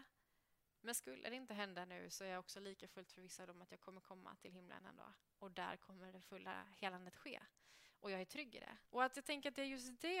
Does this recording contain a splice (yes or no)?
yes